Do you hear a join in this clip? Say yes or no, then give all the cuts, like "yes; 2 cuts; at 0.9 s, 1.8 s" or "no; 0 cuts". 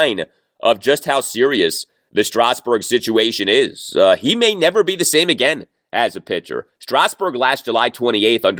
no; 0 cuts